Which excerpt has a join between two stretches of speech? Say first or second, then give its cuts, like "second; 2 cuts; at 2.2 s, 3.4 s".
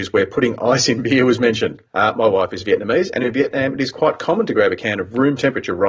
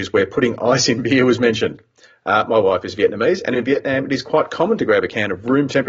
first; 1 cut; at 1.9 s